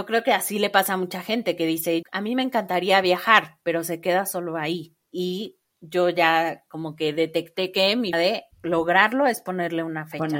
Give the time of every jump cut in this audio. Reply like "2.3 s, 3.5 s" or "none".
2.0 s, 5.0 s, 8.1 s, 8.5 s